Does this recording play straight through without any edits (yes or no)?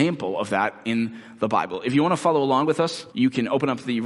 no